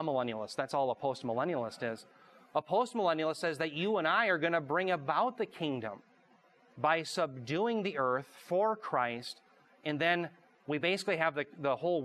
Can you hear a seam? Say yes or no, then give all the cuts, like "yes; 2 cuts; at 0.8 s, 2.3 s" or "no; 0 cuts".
no; 0 cuts